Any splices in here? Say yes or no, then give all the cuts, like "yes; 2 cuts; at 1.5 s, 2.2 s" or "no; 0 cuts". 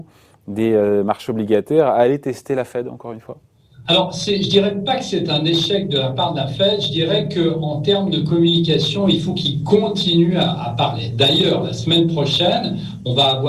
no; 0 cuts